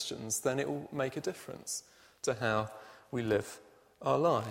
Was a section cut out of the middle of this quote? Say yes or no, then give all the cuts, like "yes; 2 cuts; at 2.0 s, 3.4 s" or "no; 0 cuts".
no; 0 cuts